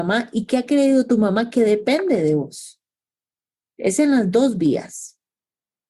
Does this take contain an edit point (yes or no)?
no